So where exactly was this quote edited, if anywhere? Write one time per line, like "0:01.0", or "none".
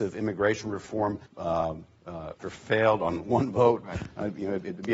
0:01.3
0:02.4